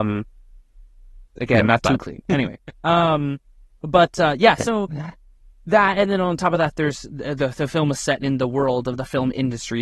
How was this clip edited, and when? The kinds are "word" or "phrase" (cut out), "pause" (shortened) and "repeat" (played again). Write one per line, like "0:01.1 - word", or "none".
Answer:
0:02.7 - pause

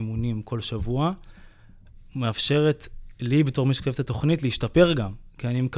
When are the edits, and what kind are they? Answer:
none

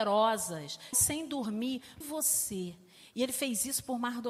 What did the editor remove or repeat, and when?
0:00.9 - word
0:02.0 - phrase

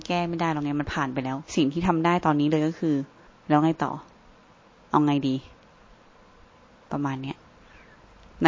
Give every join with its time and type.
0:01.5 - pause
0:03.3 - pause

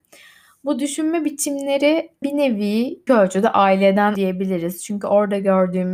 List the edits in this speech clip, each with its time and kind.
0:02.2 - word
0:03.1 - word
0:04.2 - word

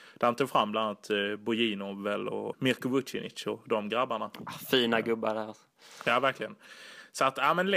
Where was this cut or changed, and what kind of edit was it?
0:02.5 - word

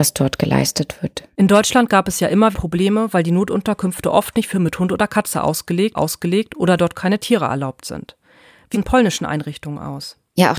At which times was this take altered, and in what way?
0:01.3 - pause
0:02.5 - word
0:04.5 - word
0:05.9 - repeat
0:08.7 - phrase

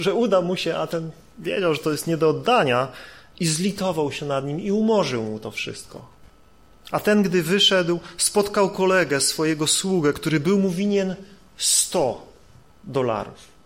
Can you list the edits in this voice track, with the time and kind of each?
none

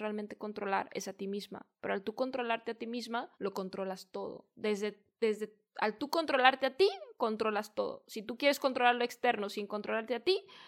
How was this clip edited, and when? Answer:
0:03.3 - pause

